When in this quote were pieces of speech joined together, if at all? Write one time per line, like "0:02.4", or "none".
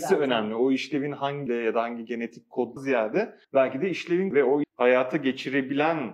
0:01.5
0:02.8
0:03.4
0:04.3
0:04.6